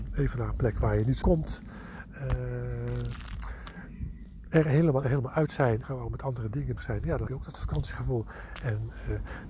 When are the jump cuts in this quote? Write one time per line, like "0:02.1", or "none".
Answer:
0:01.2
0:05.0
0:05.8
0:06.8
0:07.3